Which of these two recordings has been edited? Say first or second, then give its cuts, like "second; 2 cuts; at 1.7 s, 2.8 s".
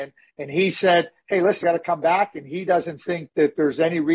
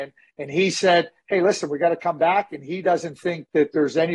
first; 1 cut; at 1.6 s